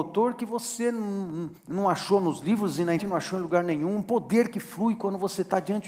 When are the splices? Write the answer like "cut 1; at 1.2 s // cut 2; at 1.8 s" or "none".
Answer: cut 1; at 1.6 s // cut 2; at 3.0 s